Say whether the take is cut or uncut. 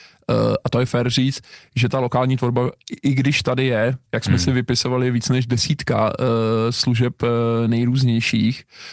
cut